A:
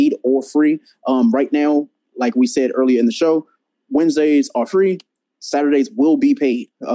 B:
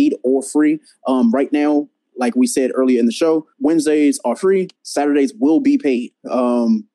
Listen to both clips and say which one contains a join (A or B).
B